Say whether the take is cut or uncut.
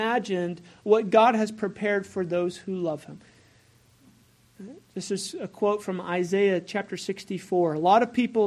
uncut